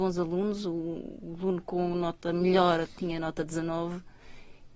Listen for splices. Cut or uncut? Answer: uncut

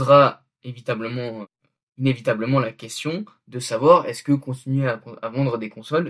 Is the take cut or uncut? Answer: uncut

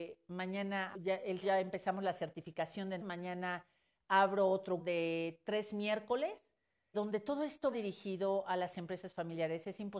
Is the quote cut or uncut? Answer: cut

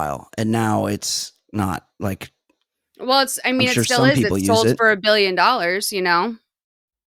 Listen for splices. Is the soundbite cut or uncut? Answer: uncut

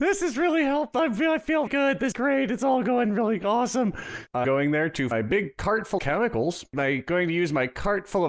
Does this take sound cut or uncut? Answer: cut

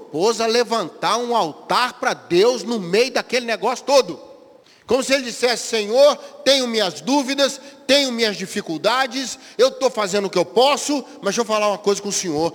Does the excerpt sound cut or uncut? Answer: cut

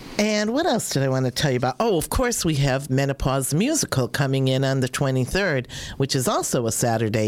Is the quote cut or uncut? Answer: uncut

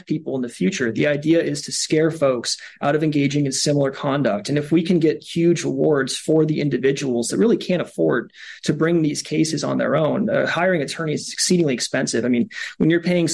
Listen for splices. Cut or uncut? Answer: uncut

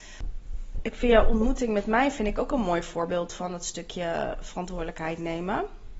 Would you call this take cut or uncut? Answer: uncut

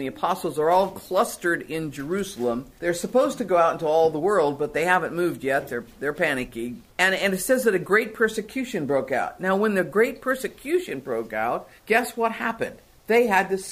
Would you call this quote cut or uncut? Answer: cut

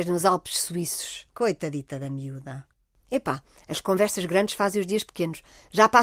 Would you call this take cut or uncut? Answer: uncut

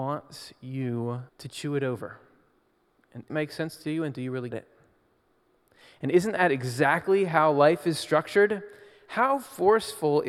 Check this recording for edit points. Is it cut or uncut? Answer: cut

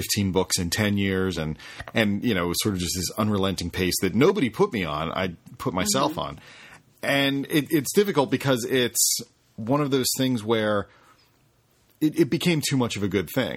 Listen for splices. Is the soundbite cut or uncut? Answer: uncut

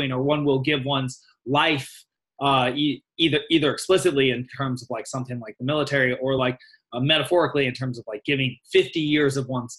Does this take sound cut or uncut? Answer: uncut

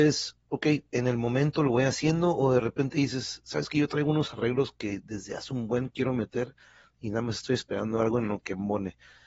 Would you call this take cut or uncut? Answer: uncut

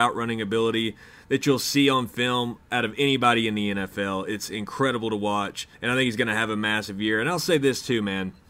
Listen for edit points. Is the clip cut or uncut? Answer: cut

